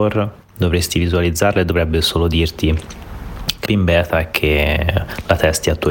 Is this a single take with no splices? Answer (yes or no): no